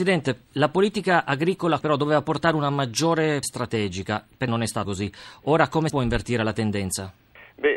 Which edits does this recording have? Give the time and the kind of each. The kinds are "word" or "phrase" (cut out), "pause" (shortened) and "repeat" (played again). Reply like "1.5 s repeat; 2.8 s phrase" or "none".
1.8 s word; 3.4 s word; 4.5 s word; 4.8 s word; 5.9 s word